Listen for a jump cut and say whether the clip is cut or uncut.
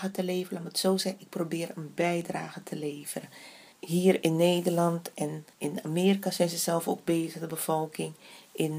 cut